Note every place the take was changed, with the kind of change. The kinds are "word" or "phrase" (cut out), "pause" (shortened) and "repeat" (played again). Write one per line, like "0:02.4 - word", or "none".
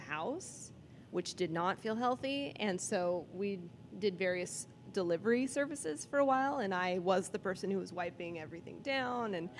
none